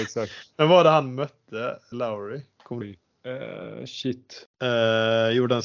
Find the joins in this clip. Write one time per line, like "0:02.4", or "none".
0:01.9
0:02.8
0:04.5